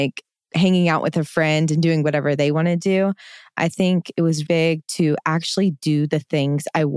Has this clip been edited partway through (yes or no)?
yes